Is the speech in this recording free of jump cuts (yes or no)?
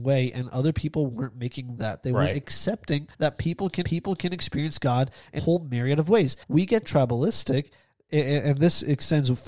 no